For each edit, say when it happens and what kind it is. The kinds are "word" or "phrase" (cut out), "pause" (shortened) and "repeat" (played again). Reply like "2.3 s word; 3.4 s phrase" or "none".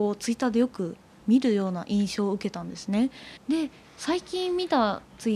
3.4 s pause